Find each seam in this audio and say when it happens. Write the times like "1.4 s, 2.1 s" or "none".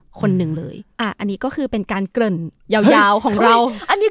0.9 s